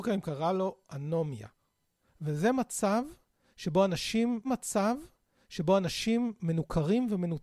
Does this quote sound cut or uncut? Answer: cut